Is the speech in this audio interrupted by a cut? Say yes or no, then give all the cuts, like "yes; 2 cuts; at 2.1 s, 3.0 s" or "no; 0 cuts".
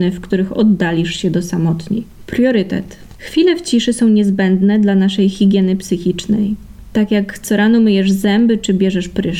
no; 0 cuts